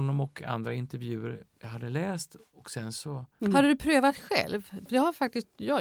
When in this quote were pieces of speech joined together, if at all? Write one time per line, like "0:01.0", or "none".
0:03.3